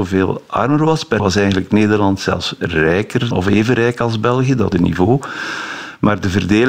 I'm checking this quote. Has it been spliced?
yes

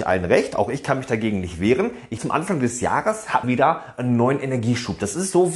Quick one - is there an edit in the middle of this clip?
yes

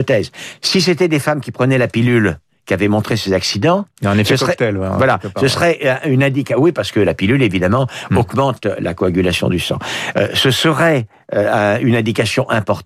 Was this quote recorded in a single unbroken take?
yes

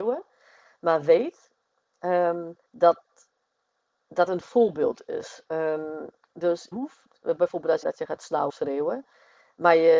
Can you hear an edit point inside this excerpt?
yes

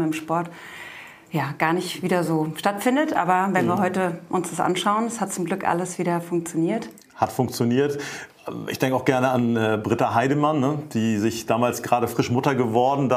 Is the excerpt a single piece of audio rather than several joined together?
yes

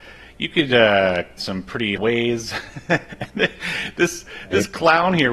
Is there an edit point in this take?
yes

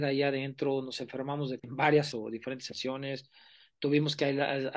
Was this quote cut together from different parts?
yes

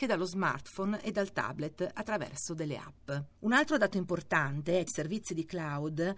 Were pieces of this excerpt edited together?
yes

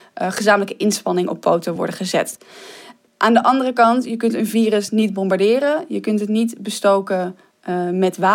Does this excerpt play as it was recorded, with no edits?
yes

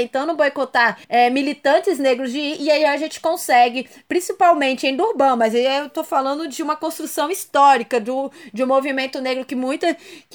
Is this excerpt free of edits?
no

